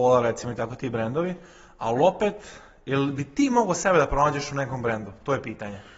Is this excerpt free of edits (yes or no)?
yes